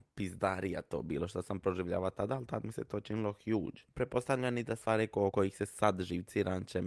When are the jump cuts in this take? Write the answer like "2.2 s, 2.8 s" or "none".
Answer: 5.3 s

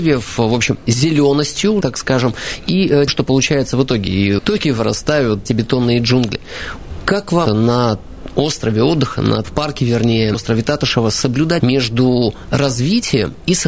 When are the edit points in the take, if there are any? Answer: 1.8 s, 3.1 s, 4.4 s, 5.5 s, 7.5 s, 9.4 s, 10.3 s, 11.6 s

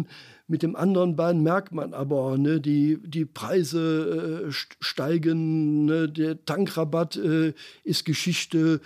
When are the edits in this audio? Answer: none

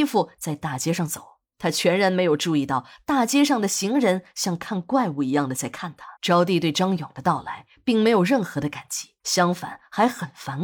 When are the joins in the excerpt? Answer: 1.5 s, 6.2 s, 9.2 s

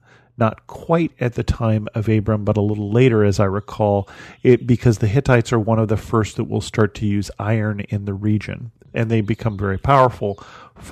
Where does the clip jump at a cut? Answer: none

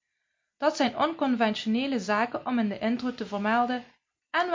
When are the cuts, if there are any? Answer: none

